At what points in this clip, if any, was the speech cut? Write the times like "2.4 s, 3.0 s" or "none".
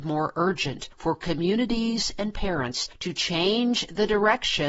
none